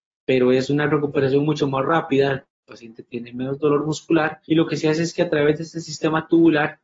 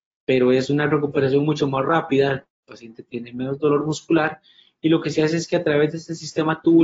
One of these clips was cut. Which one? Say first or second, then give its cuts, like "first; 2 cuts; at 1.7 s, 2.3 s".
first; 1 cut; at 4.4 s